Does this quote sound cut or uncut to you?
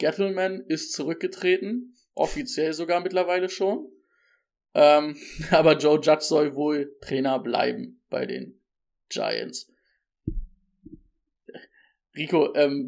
uncut